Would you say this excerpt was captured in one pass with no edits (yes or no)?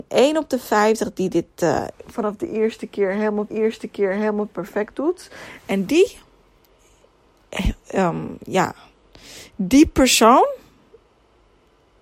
no